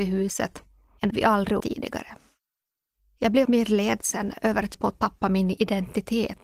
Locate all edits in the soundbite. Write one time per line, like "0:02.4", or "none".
0:01.1
0:01.6
0:03.4
0:04.7